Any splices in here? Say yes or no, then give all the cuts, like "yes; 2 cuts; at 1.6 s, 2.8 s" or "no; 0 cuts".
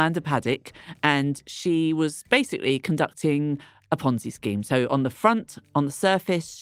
no; 0 cuts